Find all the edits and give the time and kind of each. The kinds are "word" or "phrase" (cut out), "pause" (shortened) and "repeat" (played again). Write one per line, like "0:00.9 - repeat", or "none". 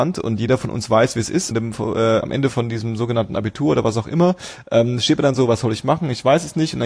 0:01.5 - phrase
0:02.2 - word